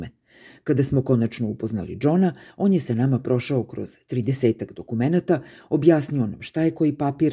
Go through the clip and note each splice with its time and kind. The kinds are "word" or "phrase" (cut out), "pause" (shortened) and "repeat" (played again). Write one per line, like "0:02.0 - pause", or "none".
none